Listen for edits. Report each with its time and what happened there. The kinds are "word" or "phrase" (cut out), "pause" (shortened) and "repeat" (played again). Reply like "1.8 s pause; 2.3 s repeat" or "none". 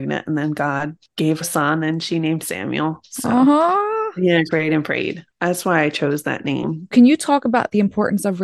1.4 s word; 2.4 s word; 4.5 s word; 5.3 s word; 6.9 s word